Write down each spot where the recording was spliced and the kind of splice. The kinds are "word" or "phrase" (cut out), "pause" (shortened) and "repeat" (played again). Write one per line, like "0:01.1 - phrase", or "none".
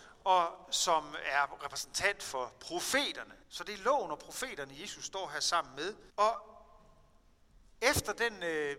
0:03.4 - pause
0:06.1 - pause